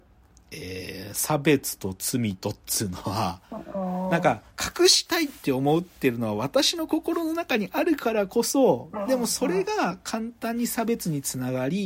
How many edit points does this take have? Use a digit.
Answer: 1